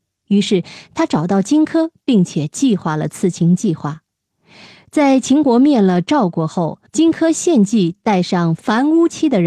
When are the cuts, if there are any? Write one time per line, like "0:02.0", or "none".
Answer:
0:06.9